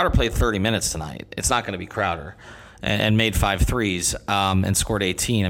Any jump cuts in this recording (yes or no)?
no